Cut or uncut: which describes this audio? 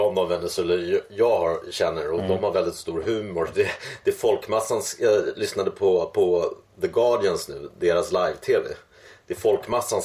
uncut